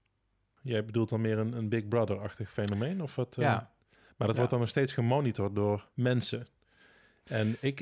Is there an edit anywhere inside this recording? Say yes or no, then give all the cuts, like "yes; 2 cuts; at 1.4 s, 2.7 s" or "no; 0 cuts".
yes; 2 cuts; at 3.8 s, 5.9 s